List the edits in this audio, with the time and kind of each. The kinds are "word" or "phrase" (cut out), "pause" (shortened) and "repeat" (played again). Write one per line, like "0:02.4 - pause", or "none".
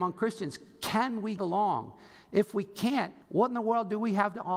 0:01.4 - word
0:03.2 - pause

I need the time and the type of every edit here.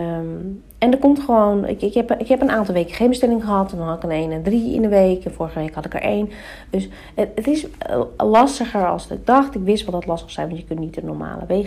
none

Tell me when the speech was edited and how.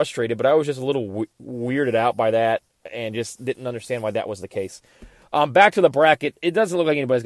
none

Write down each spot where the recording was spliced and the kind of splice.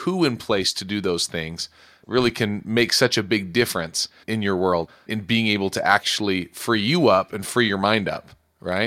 none

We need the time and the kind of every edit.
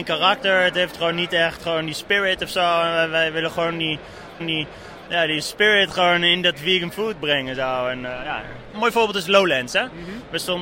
0:04.4 - repeat

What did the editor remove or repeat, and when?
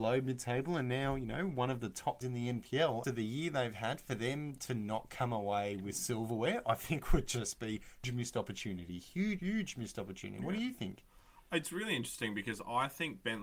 0:02.2 - word
0:03.0 - phrase
0:08.0 - phrase
0:09.4 - word

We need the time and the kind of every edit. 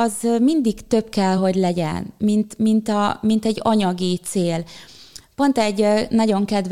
none

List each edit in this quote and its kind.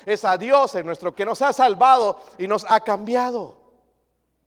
0:01.1 - word

